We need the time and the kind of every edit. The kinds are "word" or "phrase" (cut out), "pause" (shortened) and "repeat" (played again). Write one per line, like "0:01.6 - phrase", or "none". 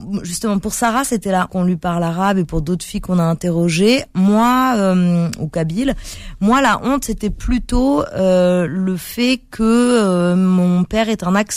0:01.5 - word